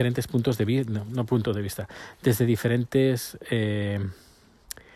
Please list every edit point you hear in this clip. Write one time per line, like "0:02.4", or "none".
none